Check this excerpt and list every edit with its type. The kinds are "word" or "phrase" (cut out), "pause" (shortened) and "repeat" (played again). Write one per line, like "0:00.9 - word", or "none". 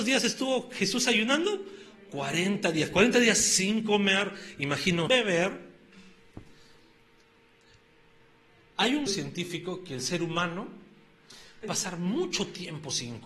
0:05.1 - word
0:09.1 - word
0:11.6 - word